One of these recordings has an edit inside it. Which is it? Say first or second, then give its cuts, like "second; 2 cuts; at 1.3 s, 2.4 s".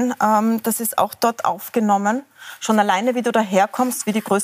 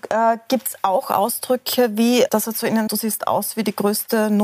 second; 2 cuts; at 2.3 s, 2.9 s